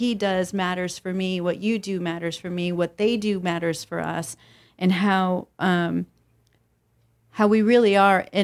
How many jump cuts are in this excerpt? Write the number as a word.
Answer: zero